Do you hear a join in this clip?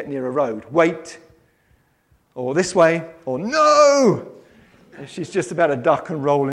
no; 0 cuts

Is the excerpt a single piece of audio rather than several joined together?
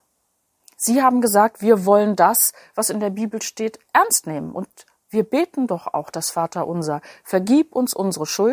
yes; 0 cuts

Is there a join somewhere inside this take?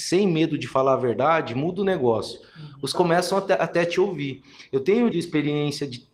yes; 2 cuts; at 2.9 s, 5.1 s

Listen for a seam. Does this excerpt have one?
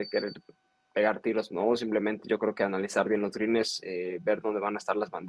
yes; 1 cut; at 1.5 s

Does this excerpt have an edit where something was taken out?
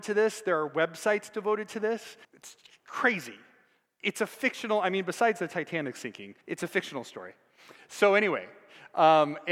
yes; 2 cuts; at 2.2 s, 6.4 s

